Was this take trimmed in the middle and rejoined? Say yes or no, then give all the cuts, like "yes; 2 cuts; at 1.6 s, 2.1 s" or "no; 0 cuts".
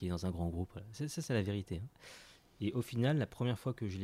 no; 0 cuts